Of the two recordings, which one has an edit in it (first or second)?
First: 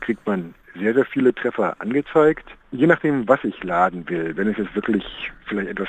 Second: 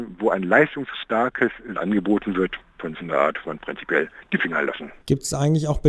second